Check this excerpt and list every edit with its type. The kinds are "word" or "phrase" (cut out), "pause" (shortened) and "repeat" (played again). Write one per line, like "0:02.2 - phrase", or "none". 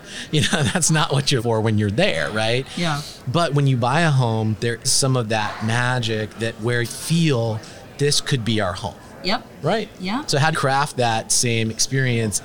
0:01.4 - word
0:04.8 - word
0:06.8 - word
0:10.5 - word